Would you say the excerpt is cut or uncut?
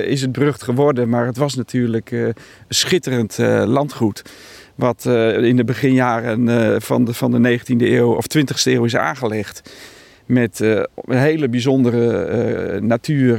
uncut